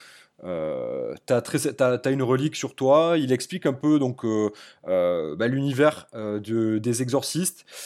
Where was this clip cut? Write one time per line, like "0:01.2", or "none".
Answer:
none